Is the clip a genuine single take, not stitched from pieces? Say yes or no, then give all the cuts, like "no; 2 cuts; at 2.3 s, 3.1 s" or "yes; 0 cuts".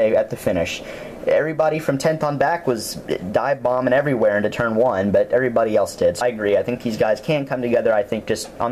no; 1 cut; at 6.2 s